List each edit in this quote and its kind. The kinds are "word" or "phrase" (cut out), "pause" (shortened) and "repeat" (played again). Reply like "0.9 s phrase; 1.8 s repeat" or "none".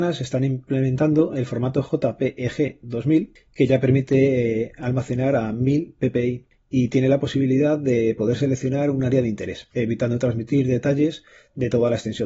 none